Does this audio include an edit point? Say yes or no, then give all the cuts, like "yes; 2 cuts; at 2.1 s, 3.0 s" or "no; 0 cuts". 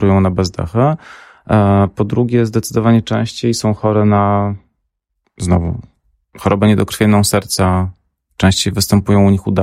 no; 0 cuts